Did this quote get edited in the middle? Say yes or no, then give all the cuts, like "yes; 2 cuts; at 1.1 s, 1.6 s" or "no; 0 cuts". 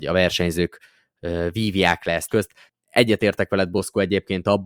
yes; 1 cut; at 2.3 s